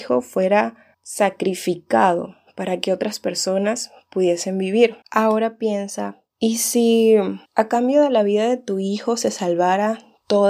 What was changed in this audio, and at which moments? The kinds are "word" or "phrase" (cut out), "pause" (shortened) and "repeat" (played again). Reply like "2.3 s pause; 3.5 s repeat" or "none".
0.9 s pause; 5.0 s pause; 6.3 s pause; 7.5 s pause